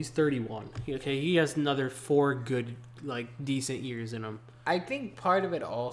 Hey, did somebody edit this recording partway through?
no; 0 cuts

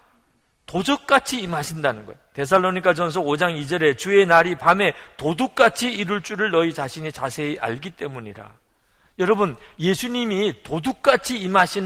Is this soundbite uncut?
yes; 0 cuts

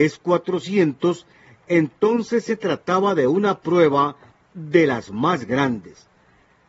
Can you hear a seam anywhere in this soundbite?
no; 0 cuts

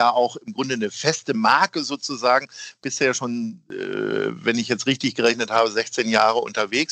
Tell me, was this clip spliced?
no; 0 cuts

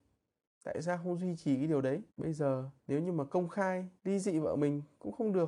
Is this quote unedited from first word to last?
no; 3 cuts; at 2.1 s, 2.8 s, 4.0 s

